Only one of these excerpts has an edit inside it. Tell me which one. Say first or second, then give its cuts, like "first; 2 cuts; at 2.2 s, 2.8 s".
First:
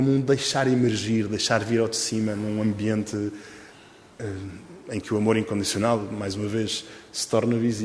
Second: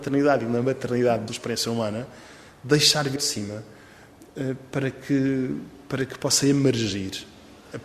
second; 2 cuts; at 1.3 s, 3.2 s